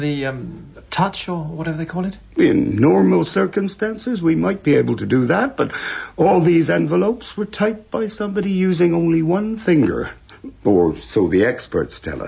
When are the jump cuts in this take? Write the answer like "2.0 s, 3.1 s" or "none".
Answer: none